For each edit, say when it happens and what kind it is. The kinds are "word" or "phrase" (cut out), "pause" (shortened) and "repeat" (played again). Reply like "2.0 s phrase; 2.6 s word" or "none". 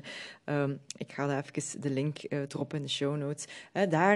none